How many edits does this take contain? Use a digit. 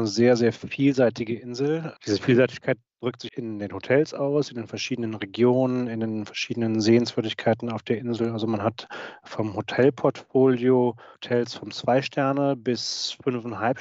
2